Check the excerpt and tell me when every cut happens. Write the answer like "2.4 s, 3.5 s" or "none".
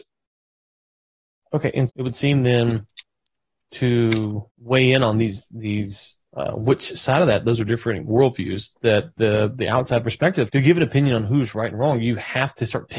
1.9 s, 4.5 s, 6.2 s, 10.5 s